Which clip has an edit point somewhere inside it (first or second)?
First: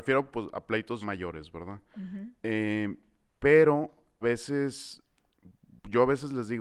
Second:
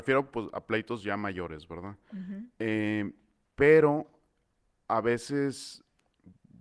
first